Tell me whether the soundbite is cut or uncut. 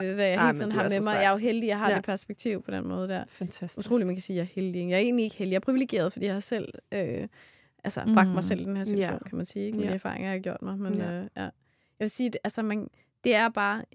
uncut